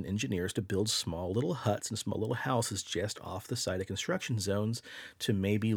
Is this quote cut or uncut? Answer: uncut